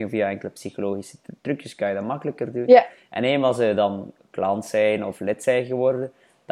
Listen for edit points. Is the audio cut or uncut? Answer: uncut